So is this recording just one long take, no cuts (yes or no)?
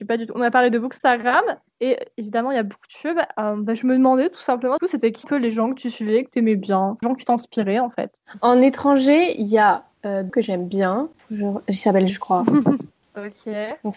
no